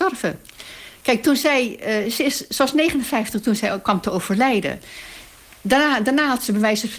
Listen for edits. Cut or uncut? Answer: uncut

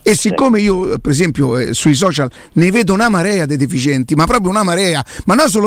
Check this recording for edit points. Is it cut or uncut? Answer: uncut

